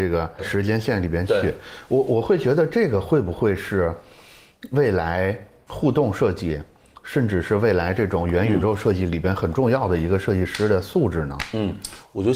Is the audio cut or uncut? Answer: uncut